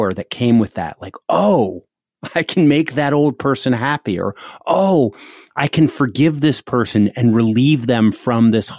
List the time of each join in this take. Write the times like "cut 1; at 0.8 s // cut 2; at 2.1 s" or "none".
none